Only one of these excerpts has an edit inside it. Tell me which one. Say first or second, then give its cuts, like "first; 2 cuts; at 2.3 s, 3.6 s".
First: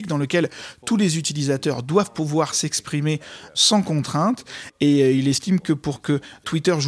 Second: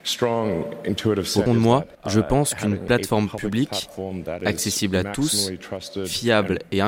second; 2 cuts; at 1.5 s, 1.9 s